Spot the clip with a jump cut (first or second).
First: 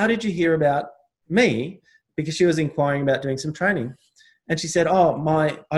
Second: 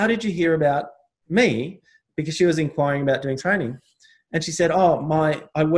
second